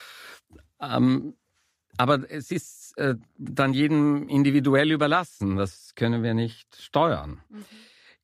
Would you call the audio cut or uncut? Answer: uncut